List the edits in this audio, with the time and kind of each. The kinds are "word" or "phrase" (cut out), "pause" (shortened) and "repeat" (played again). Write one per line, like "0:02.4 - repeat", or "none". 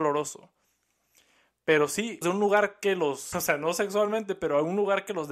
0:02.2 - word
0:03.3 - word